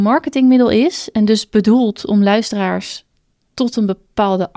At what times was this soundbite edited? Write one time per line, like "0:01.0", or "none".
none